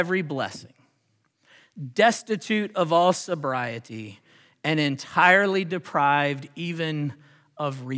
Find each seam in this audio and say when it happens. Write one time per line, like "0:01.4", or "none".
none